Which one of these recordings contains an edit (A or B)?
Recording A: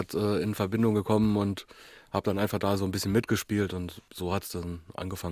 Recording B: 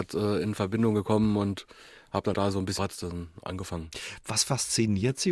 B